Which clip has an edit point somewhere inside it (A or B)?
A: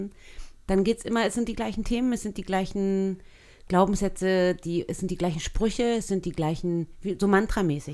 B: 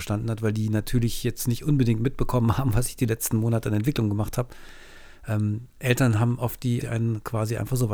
B